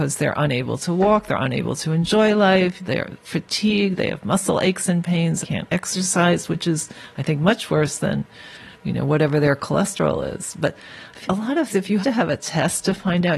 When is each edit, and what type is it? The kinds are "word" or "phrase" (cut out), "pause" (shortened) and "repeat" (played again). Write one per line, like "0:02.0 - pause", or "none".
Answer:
0:05.4 - phrase
0:08.7 - pause
0:11.3 - word
0:11.7 - word
0:12.0 - word

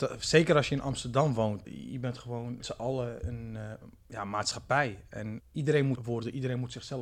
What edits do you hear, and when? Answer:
0:01.6 - word
0:02.6 - word
0:03.2 - word
0:04.0 - pause
0:05.4 - word
0:06.0 - word

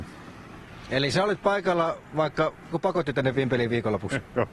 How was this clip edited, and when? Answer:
0:02.7 - phrase

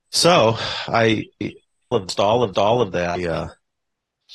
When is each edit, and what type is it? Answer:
0:01.9 - phrase
0:02.5 - repeat

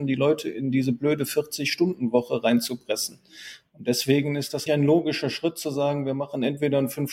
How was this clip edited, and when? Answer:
0:04.7 - word

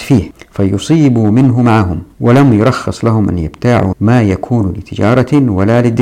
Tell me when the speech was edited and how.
0:03.9 - word

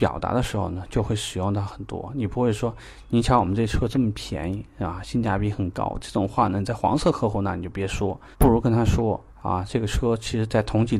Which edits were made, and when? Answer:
0:08.3 - pause
0:09.3 - pause

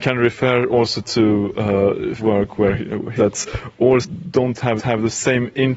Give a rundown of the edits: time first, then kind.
0:02.2 - word
0:03.2 - word
0:04.0 - word
0:04.8 - repeat

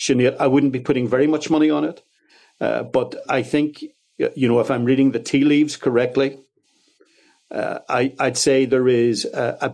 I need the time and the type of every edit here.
0:03.3 - word

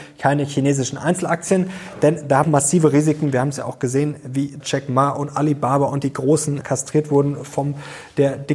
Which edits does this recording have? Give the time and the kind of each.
0:02.4 - phrase
0:04.6 - word
0:06.6 - word

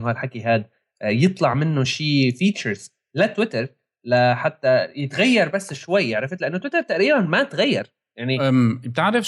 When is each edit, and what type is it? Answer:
none

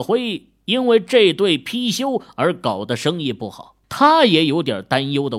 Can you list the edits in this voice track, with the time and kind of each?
0:03.8 - pause

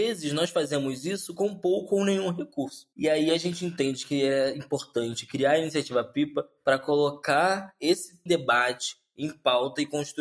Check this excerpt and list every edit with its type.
0:02.9 - pause
0:08.3 - phrase

